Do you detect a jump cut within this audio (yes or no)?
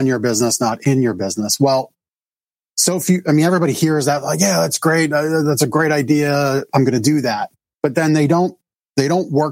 no